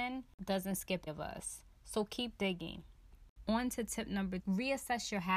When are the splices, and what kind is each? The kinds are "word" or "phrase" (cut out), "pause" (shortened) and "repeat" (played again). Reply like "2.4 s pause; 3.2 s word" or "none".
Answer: 1.1 s word; 4.4 s word